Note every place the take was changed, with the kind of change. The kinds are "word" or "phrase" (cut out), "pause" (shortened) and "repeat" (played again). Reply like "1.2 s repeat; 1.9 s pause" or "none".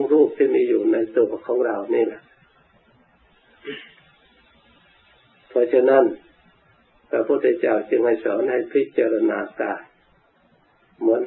none